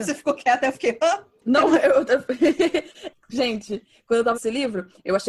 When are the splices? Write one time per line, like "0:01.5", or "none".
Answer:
0:04.3